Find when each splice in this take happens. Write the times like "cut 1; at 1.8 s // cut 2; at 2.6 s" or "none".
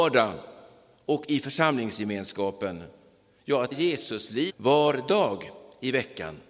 cut 1; at 3.7 s // cut 2; at 4.5 s